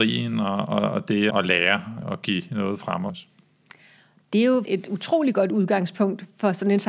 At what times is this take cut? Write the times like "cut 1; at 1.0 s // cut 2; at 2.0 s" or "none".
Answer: cut 1; at 1.3 s // cut 2; at 2.0 s // cut 3; at 3.1 s // cut 4; at 4.6 s